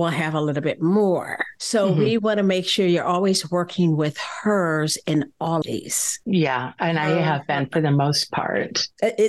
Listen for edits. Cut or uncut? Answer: cut